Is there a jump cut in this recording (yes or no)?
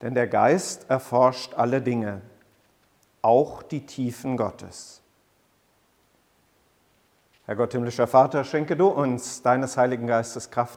no